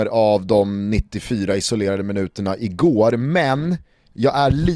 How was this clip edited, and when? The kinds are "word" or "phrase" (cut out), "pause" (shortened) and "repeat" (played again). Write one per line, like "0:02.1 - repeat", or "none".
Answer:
none